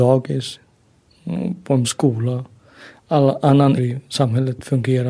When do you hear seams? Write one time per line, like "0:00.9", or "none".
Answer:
0:01.8
0:03.8